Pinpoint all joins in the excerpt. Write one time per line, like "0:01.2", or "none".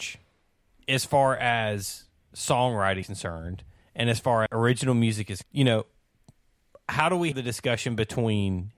0:03.0
0:04.5
0:05.4
0:07.3